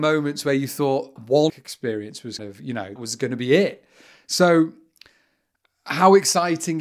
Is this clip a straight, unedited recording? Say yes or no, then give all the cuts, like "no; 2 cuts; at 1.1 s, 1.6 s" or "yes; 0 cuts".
no; 4 cuts; at 1.2 s, 1.5 s, 2.4 s, 3.0 s